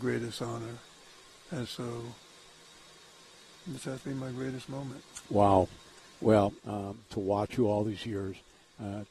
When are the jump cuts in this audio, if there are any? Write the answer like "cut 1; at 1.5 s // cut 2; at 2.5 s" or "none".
cut 1; at 1.7 s // cut 2; at 6.6 s